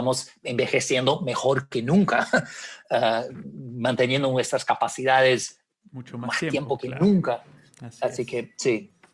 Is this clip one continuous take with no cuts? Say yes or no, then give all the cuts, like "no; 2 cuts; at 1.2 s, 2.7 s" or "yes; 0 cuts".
yes; 0 cuts